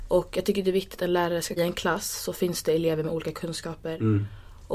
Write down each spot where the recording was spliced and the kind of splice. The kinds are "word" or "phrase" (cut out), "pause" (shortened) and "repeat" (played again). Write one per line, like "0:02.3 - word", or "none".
0:01.0 - word
0:01.6 - phrase